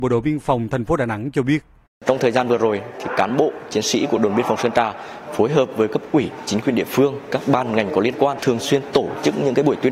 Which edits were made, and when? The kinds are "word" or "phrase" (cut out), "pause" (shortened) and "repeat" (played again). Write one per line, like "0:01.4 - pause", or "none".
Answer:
none